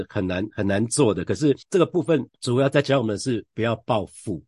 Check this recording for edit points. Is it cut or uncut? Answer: cut